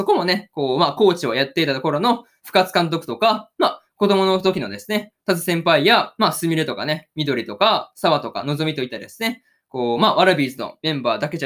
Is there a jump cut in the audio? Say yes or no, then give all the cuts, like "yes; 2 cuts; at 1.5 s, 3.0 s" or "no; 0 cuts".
no; 0 cuts